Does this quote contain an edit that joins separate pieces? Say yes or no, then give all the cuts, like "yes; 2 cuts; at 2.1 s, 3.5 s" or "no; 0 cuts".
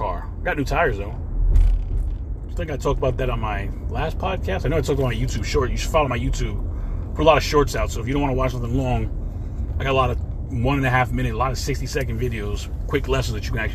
no; 0 cuts